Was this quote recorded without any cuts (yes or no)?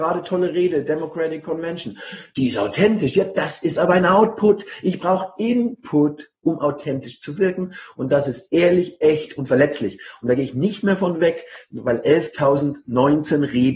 yes